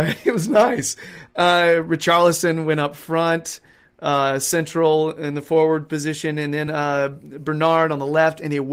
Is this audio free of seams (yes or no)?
yes